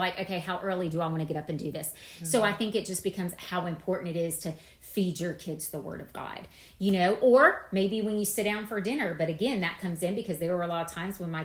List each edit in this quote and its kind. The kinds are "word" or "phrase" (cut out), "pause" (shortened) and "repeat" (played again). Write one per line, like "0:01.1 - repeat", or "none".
none